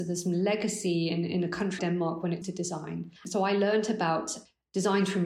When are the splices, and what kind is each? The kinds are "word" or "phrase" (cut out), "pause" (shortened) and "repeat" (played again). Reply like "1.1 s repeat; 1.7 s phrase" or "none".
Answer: 1.8 s word; 2.4 s word; 3.2 s pause

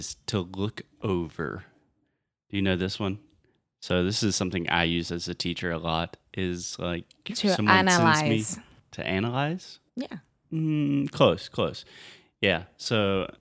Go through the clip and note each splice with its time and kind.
9.9 s pause

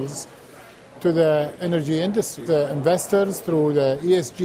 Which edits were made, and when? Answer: 2.5 s phrase

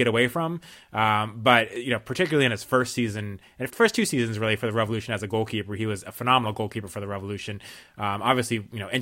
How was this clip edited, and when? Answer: 3.7 s word

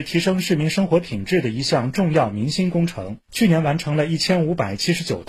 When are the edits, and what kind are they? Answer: 3.2 s pause

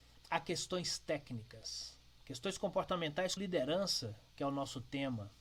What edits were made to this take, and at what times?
3.4 s word

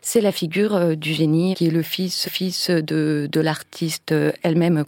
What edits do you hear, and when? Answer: 1.5 s phrase; 2.2 s repeat

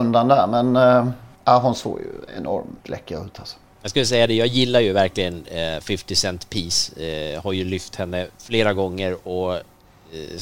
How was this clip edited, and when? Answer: 1.3 s pause; 2.8 s pause

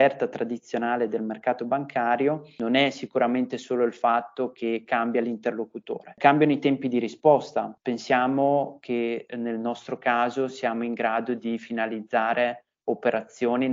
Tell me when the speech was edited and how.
none

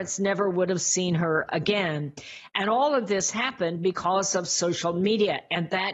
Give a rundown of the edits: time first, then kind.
none

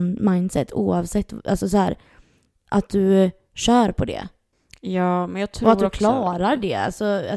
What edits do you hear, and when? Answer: none

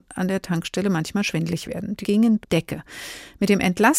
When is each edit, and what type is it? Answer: 2.0 s word; 2.4 s phrase

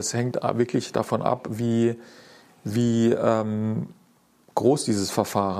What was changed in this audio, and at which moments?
none

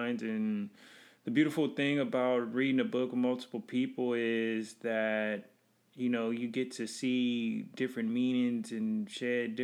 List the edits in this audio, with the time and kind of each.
none

